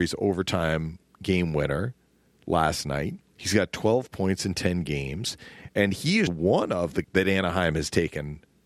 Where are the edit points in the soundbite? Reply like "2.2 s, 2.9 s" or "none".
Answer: 6.3 s, 7.0 s